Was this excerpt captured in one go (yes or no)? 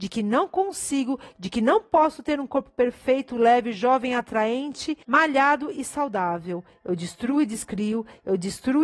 no